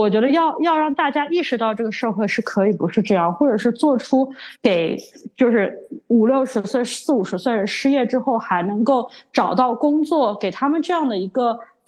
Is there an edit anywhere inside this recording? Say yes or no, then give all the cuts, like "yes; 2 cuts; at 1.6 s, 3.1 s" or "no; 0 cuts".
yes; 1 cut; at 4.6 s